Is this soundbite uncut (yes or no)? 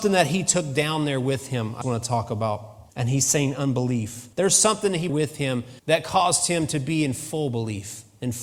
no